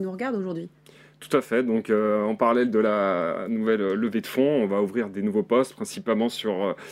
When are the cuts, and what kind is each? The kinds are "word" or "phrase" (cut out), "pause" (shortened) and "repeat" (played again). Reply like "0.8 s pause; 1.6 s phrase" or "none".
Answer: none